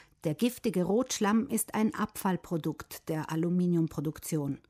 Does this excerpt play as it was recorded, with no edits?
yes; 0 cuts

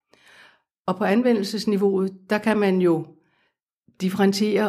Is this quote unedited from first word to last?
yes; 0 cuts

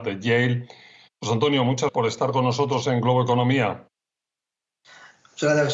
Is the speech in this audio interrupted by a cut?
yes; 1 cut; at 1.9 s

